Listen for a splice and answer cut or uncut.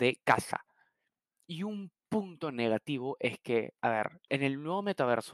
cut